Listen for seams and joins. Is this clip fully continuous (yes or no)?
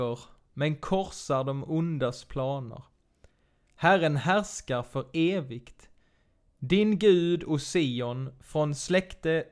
yes